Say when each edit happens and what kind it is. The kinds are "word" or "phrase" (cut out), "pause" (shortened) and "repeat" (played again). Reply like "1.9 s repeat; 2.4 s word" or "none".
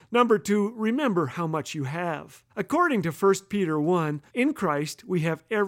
2.5 s pause; 4.3 s pause